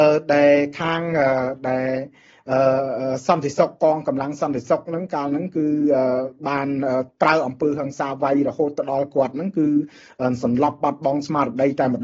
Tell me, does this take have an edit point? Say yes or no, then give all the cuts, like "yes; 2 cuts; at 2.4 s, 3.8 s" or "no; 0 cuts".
no; 0 cuts